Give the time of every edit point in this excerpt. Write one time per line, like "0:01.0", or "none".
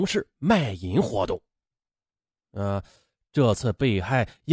none